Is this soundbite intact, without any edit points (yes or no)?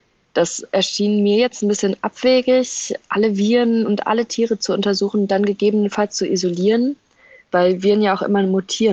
yes